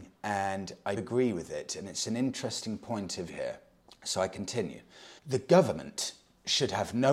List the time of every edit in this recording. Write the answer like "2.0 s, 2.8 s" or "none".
1.0 s, 3.3 s, 3.8 s, 5.2 s